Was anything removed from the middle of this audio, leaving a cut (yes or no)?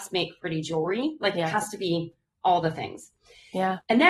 no